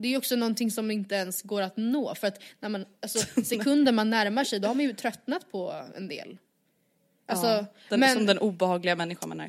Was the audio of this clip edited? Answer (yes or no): no